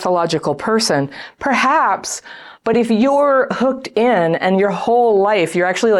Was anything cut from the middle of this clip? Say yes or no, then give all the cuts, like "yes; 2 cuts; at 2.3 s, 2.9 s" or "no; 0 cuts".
no; 0 cuts